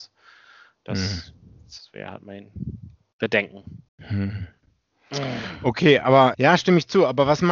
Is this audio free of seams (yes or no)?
no